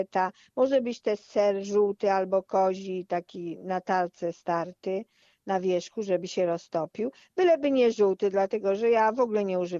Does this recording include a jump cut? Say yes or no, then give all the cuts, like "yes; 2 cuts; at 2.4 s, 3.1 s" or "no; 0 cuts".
no; 0 cuts